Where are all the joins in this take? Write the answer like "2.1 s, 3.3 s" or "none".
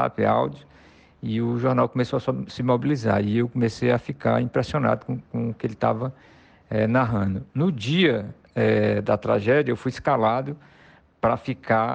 none